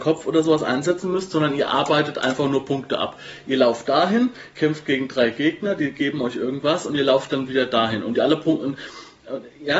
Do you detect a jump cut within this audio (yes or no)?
no